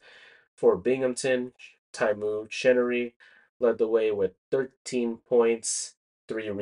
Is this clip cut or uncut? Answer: uncut